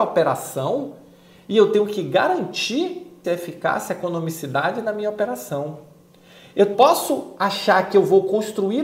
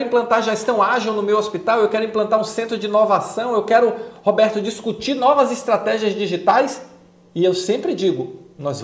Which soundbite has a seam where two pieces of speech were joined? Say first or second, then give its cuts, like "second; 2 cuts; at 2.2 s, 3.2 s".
first; 2 cuts; at 3.2 s, 6.7 s